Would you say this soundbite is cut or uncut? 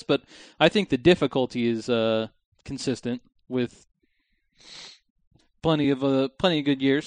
uncut